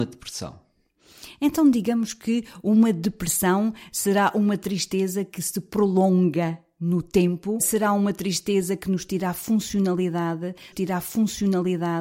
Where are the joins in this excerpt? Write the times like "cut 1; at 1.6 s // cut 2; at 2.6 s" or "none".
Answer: cut 1; at 7.6 s // cut 2; at 10.7 s

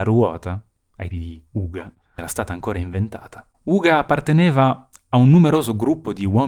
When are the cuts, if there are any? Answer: cut 1; at 1.1 s // cut 2; at 2.2 s // cut 3; at 3.5 s

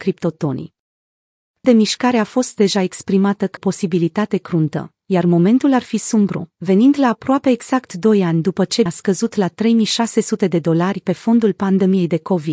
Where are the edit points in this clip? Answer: cut 1; at 1.6 s // cut 2; at 3.6 s // cut 3; at 8.9 s

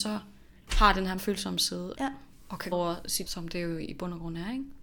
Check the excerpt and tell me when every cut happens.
cut 1; at 1.2 s // cut 2; at 1.9 s // cut 3; at 2.7 s // cut 4; at 3.3 s

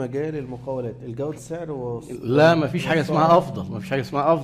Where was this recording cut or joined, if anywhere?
cut 1; at 1.3 s

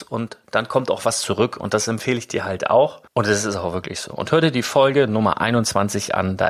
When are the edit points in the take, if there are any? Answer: cut 1; at 3.1 s

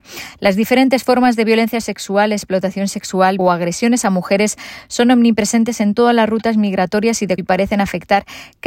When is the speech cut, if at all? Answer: cut 1; at 3.4 s // cut 2; at 7.4 s

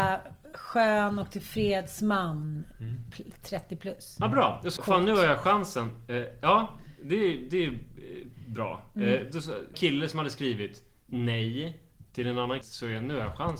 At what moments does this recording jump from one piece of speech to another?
cut 1; at 4.8 s // cut 2; at 9.7 s // cut 3; at 12.6 s

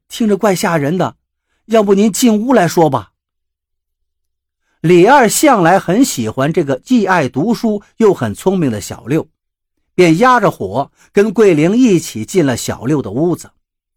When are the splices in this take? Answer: none

